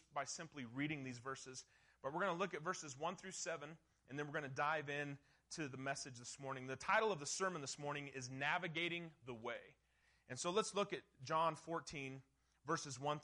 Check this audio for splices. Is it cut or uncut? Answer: uncut